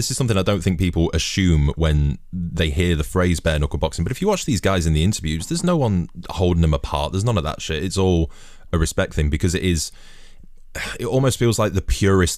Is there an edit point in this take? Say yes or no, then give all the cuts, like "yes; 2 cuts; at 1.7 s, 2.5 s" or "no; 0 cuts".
no; 0 cuts